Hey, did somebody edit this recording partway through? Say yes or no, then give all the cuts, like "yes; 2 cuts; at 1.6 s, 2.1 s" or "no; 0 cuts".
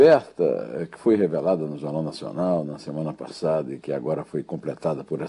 no; 0 cuts